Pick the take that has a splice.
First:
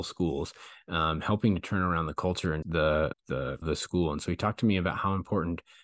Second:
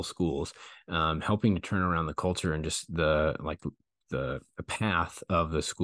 first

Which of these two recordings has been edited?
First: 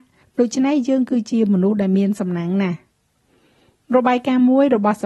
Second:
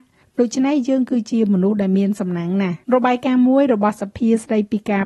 second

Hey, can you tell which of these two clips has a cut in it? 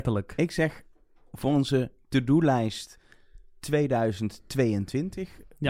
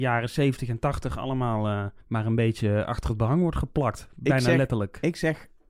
second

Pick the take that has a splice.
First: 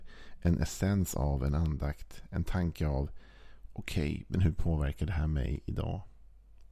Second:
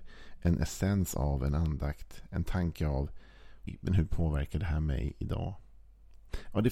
second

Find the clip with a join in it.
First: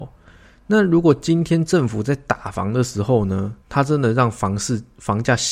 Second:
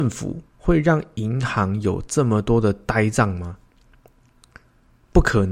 first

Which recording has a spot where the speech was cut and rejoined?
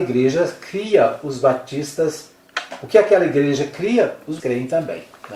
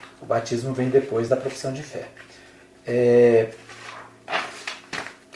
first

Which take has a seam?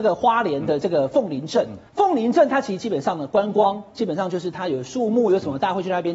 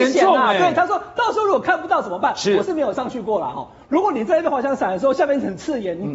first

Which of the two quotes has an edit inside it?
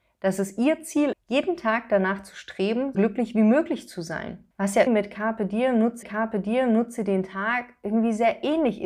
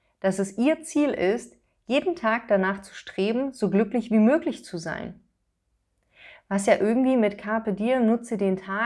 first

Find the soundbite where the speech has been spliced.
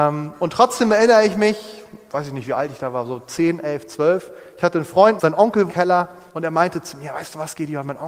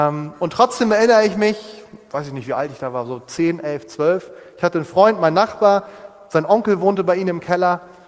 first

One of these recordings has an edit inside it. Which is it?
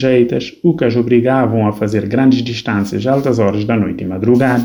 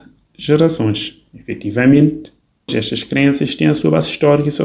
second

